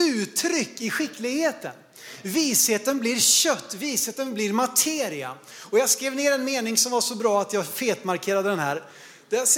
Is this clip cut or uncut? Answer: uncut